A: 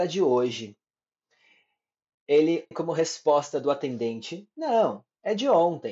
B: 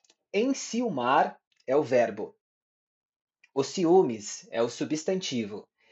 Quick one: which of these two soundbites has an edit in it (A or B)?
A